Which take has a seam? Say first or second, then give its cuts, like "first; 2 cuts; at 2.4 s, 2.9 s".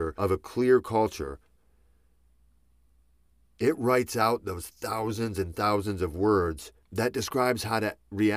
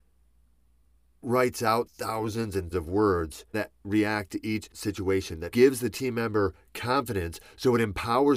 second; 6 cuts; at 1.2 s, 1.9 s, 2.7 s, 3.5 s, 4.7 s, 5.5 s